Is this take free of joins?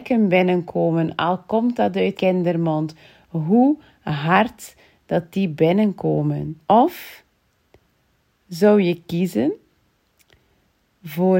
no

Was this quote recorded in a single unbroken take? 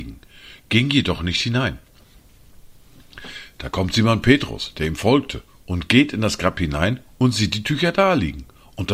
yes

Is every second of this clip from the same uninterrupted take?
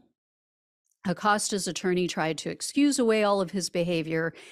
yes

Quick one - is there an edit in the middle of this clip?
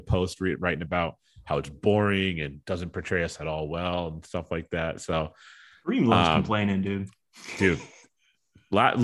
no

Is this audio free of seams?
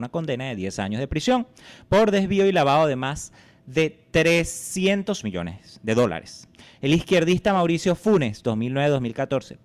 yes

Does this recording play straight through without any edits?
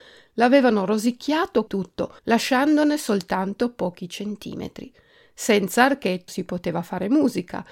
no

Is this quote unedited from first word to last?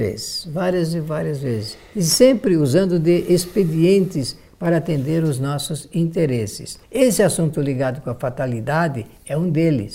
no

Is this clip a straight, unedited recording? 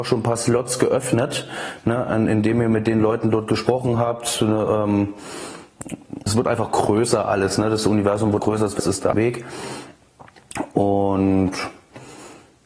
no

